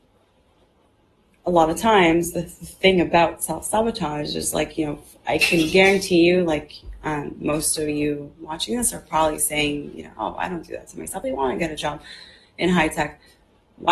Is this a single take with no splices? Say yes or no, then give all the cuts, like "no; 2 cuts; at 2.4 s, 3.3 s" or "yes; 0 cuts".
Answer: no; 1 cut; at 11.2 s